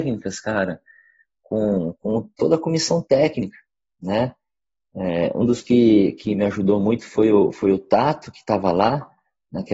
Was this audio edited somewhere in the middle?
no; 0 cuts

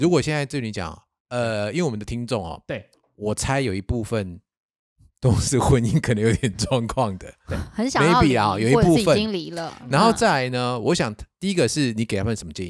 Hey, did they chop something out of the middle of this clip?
no; 0 cuts

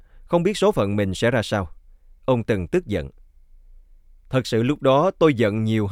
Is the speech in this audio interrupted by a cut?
no; 0 cuts

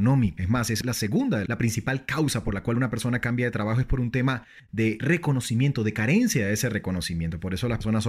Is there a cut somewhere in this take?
no; 0 cuts

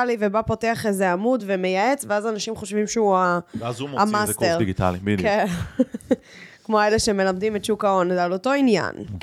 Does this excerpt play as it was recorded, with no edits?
yes; 0 cuts

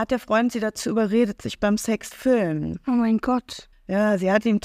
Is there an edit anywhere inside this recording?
yes; 2 cuts; at 2.1 s, 3.7 s

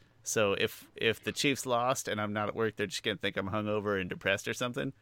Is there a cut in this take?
no; 0 cuts

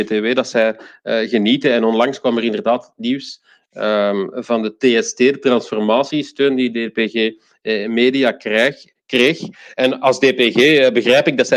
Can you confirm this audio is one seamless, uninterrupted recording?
yes; 0 cuts

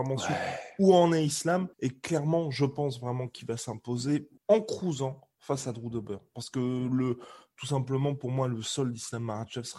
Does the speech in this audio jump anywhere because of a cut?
yes; 2 cuts; at 1.7 s, 4.4 s

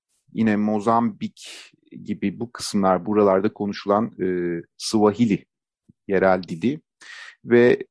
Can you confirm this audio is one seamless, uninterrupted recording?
yes; 0 cuts

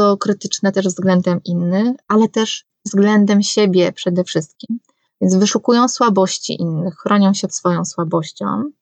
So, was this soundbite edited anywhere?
yes; 1 cut; at 7.5 s

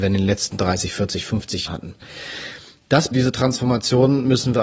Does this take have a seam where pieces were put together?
yes; 2 cuts; at 1.7 s, 3.1 s

